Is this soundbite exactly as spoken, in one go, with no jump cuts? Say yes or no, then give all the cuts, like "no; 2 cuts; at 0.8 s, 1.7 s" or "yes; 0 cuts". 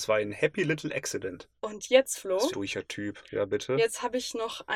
no; 3 cuts; at 1.6 s, 2.5 s, 3.3 s